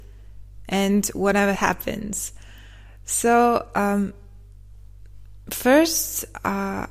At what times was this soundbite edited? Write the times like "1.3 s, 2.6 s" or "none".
1.6 s

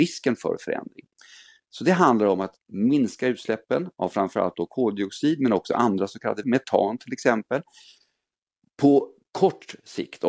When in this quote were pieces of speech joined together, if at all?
6.4 s

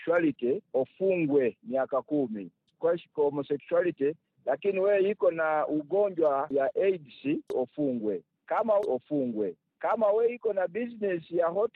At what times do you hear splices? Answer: 8.8 s

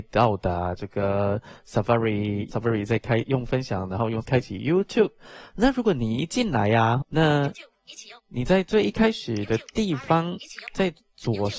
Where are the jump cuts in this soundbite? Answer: 2.5 s, 4.2 s, 7.0 s, 8.2 s

